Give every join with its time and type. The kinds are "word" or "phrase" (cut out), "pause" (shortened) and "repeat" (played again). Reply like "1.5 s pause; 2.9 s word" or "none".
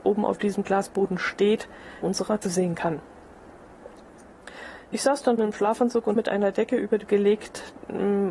2.0 s word; 2.4 s word; 5.4 s word; 6.2 s word; 7.1 s word